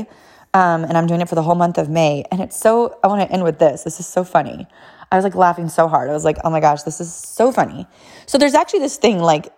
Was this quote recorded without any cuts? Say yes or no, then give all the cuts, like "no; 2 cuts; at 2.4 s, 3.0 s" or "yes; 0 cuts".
yes; 0 cuts